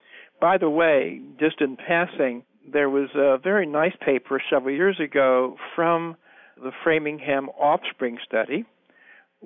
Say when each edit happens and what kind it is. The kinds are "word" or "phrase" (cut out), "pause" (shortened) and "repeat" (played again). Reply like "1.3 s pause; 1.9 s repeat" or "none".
none